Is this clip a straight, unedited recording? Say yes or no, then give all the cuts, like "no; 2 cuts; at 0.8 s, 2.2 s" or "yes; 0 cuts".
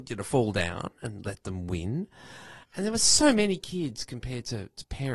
no; 1 cut; at 2.6 s